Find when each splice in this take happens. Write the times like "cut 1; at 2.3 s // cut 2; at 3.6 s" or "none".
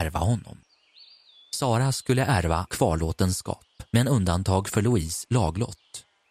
cut 1; at 2.7 s